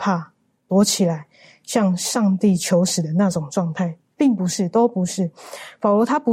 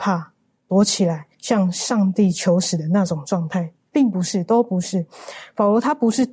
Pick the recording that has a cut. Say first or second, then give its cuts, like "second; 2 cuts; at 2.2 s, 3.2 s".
second; 1 cut; at 1.3 s